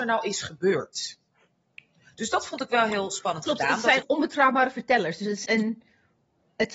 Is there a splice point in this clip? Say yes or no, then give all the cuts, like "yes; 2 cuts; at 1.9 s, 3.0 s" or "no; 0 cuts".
yes; 2 cuts; at 4.0 s, 5.5 s